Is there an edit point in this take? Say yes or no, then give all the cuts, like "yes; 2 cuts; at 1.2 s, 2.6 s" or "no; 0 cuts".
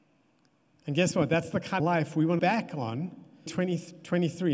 yes; 3 cuts; at 1.8 s, 2.4 s, 3.5 s